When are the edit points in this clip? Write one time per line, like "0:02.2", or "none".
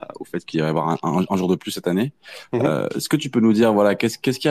none